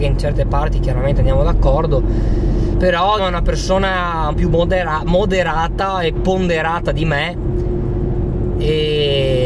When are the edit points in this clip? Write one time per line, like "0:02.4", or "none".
0:03.2
0:04.3
0:06.1